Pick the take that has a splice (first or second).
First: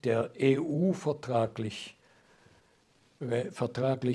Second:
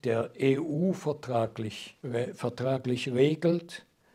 second